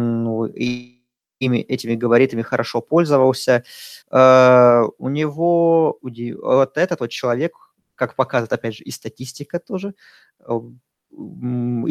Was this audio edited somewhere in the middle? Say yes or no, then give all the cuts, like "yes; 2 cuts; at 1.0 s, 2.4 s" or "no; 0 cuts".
yes; 2 cuts; at 4.0 s, 6.0 s